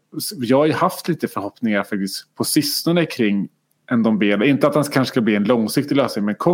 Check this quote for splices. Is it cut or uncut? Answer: uncut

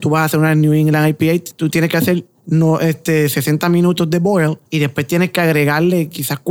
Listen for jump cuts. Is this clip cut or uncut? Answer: cut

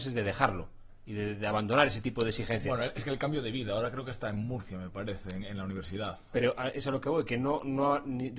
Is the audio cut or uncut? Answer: uncut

